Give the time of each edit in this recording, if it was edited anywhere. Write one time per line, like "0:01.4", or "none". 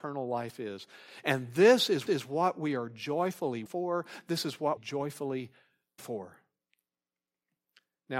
0:02.1
0:03.7
0:04.8
0:06.0